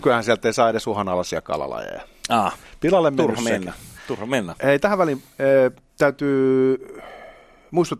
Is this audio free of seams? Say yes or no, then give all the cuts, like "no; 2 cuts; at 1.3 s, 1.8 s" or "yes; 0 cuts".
yes; 0 cuts